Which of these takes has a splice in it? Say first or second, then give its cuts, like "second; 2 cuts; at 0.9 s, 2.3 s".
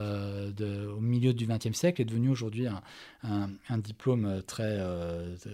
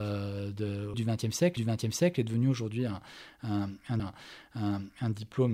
second; 3 cuts; at 0.9 s, 1.6 s, 4.0 s